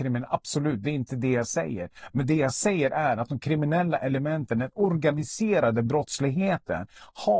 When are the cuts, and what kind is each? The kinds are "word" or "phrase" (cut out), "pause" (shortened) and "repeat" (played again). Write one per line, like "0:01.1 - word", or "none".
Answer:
none